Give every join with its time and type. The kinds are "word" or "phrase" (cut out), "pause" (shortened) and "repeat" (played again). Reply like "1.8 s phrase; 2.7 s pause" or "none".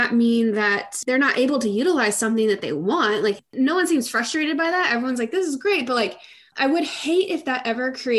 none